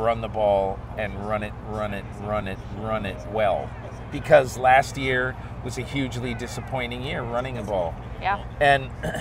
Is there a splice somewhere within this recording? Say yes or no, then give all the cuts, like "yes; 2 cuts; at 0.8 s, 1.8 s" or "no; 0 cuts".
no; 0 cuts